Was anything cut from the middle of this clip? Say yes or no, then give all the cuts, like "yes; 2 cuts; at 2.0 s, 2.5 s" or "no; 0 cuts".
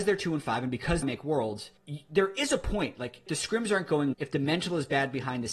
yes; 4 cuts; at 1.0 s, 1.8 s, 3.3 s, 4.1 s